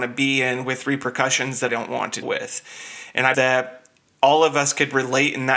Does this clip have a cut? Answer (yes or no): yes